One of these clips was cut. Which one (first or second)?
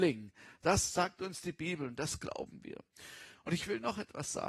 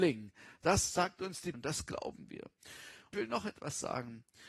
second